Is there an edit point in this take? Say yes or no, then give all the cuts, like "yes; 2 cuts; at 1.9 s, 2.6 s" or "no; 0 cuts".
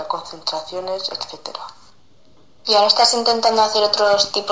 no; 0 cuts